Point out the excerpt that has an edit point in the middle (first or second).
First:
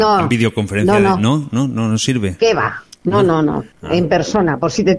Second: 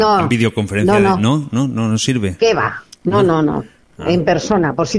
first